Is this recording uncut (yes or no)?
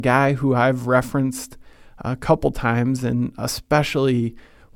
yes